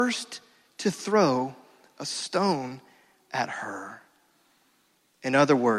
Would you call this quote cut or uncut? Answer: uncut